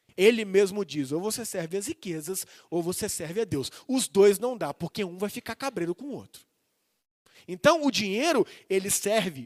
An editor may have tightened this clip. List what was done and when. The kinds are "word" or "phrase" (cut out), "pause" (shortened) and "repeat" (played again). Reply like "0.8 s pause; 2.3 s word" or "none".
none